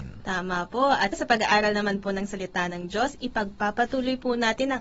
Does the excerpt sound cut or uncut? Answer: cut